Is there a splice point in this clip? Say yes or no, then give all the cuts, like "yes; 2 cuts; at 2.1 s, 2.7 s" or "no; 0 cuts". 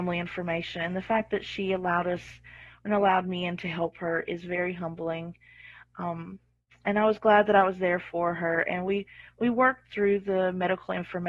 no; 0 cuts